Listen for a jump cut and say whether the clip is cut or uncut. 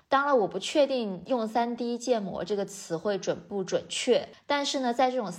uncut